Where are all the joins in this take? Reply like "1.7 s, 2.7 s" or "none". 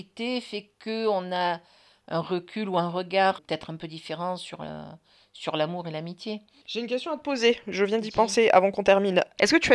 3.4 s